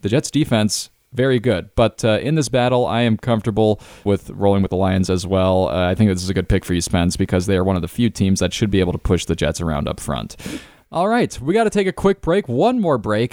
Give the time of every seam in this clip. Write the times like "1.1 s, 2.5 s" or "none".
none